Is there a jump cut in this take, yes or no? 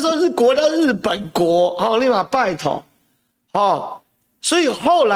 no